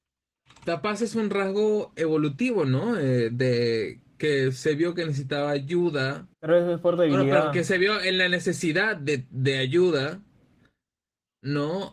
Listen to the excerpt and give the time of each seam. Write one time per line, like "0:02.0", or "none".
0:06.3